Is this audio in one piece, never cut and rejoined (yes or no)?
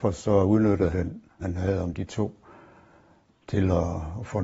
no